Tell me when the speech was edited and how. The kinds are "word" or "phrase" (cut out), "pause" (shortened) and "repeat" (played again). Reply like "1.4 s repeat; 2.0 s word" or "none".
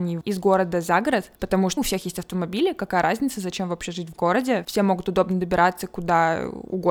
1.4 s pause; 1.8 s word